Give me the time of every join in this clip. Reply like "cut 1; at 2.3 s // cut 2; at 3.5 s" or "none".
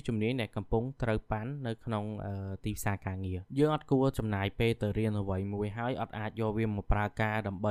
cut 1; at 3.5 s